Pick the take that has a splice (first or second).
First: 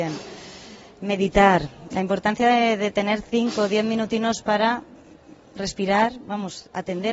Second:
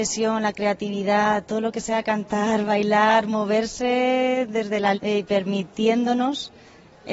second